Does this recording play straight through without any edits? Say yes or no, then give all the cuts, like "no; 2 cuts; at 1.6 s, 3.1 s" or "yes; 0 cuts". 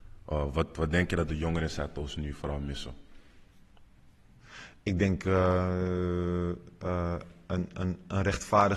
yes; 0 cuts